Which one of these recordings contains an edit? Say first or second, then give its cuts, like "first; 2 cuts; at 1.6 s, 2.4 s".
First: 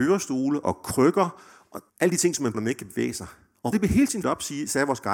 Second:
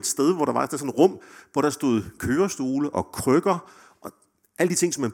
first; 4 cuts; at 1.9 s, 2.5 s, 3.7 s, 4.2 s